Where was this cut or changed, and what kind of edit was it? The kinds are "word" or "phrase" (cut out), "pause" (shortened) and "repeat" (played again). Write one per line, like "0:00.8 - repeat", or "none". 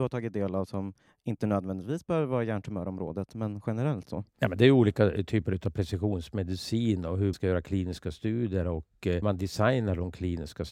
0:07.3 - word
0:09.2 - word